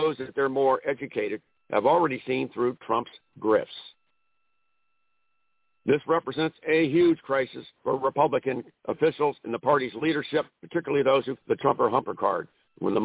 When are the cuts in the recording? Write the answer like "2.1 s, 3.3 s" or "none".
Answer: 1.6 s, 7.7 s, 9.4 s, 10.5 s, 11.4 s